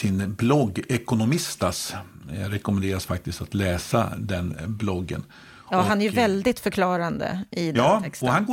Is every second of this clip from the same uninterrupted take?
yes; 0 cuts

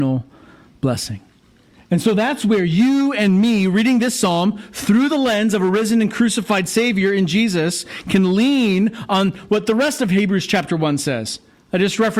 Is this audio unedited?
yes; 0 cuts

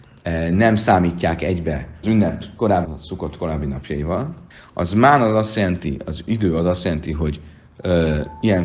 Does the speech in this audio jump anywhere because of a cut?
yes; 3 cuts; at 2.0 s, 2.9 s, 4.5 s

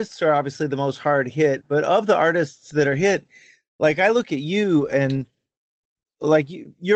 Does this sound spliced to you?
no; 0 cuts

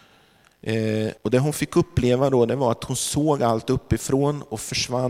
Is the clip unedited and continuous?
no; 1 cut; at 1.2 s

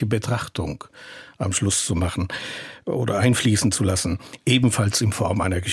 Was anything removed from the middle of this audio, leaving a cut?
no; 0 cuts

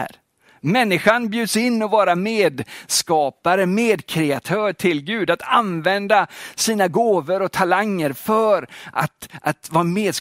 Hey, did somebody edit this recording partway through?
no; 0 cuts

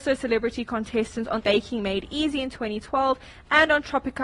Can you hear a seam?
yes; 1 cut; at 1.4 s

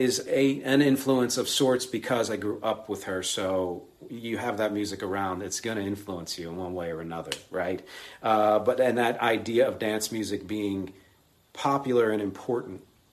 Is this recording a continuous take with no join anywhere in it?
yes; 0 cuts

